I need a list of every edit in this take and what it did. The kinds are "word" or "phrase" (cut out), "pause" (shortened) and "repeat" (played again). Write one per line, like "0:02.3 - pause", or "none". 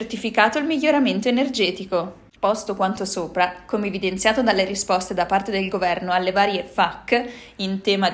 0:02.4 - pause

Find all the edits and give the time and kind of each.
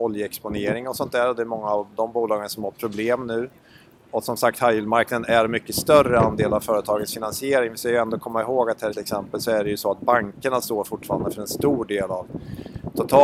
0:08.9 - phrase

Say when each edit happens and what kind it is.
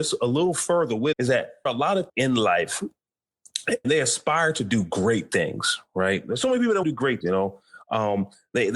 0:01.1 - word
0:01.7 - word
0:02.1 - word
0:03.8 - word
0:06.8 - word
0:07.2 - word

